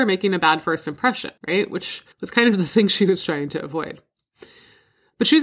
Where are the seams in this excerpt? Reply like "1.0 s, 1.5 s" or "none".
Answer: 1.4 s, 2.1 s

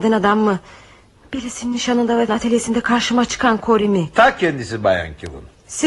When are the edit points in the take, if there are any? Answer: 2.3 s

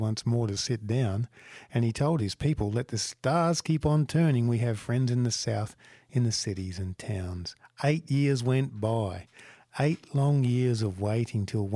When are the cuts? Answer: none

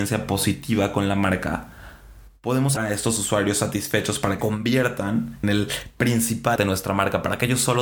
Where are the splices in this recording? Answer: 2.8 s, 4.4 s, 5.4 s, 6.6 s

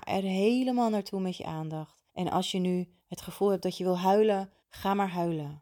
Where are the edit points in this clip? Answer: 2.1 s, 3.0 s, 4.6 s

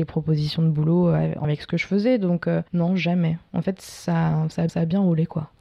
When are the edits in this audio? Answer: 1.4 s, 2.7 s, 4.7 s

